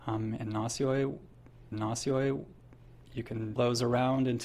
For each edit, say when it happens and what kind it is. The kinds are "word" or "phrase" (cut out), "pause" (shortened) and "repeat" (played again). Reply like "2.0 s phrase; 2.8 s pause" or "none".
1.7 s repeat; 3.6 s word

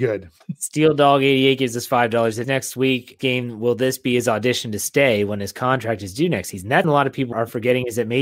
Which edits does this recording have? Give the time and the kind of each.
2.4 s phrase; 3.2 s word; 6.8 s word; 7.3 s word

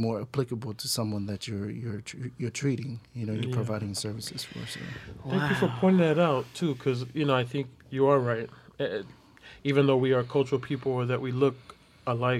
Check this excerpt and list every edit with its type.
7.8 s pause

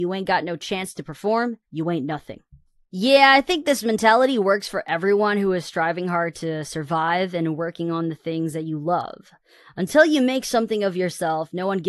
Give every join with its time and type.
1.6 s pause

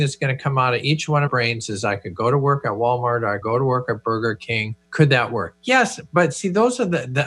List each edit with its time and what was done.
1.3 s phrase; 1.7 s word; 3.4 s word; 4.8 s pause

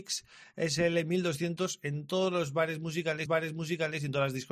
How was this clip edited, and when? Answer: 3.3 s repeat

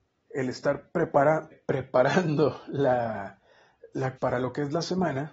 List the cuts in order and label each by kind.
1.5 s word; 4.2 s word

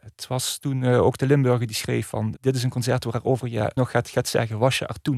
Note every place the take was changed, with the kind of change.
2.4 s word; 3.8 s phrase

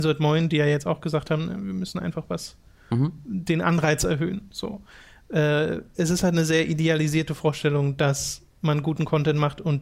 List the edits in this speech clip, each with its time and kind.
none

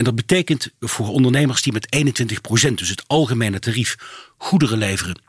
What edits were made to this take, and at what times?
none

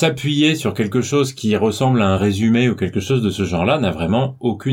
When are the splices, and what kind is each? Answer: none

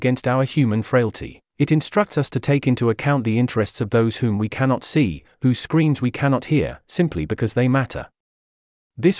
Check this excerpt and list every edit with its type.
none

